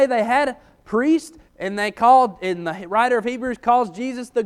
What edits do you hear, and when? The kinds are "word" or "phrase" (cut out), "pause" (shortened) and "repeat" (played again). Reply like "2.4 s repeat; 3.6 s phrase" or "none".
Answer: 1.5 s pause